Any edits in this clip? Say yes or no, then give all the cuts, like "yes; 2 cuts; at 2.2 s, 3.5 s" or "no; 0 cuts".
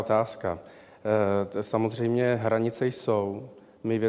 no; 0 cuts